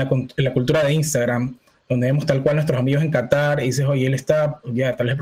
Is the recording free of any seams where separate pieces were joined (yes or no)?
yes